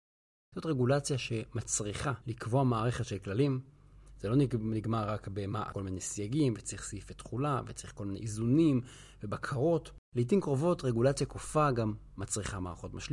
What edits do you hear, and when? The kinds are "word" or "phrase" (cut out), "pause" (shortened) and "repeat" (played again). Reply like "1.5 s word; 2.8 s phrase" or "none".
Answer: 2.2 s pause; 5.7 s phrase; 10.0 s pause